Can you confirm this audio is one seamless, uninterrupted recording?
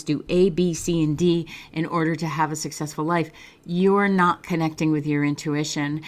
yes; 0 cuts

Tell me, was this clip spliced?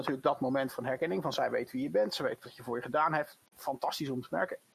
no; 0 cuts

